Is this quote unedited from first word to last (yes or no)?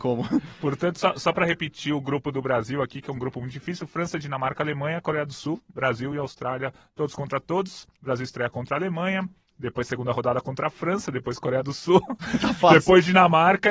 yes